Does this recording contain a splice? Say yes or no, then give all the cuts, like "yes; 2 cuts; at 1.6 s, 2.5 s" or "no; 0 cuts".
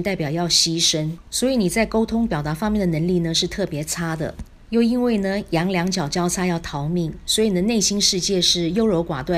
yes; 1 cut; at 4.6 s